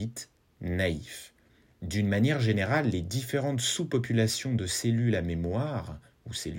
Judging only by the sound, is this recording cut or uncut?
uncut